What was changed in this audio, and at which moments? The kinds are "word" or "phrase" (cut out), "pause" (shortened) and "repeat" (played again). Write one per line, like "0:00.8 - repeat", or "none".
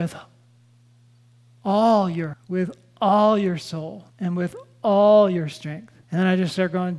0:02.3 - word
0:04.1 - pause
0:06.0 - pause